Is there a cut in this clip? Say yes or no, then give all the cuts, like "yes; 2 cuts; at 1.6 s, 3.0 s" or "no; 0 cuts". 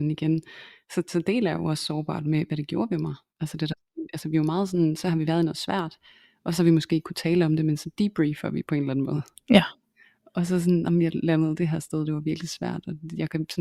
no; 0 cuts